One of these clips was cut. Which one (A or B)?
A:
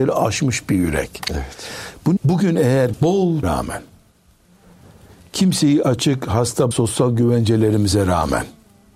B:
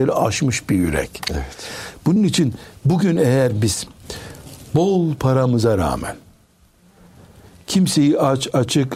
A